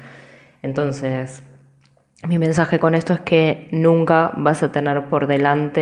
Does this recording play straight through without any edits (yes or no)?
yes